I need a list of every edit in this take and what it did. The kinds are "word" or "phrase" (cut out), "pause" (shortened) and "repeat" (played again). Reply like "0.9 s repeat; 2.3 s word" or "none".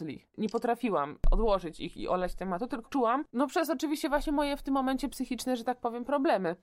2.8 s word; 3.3 s pause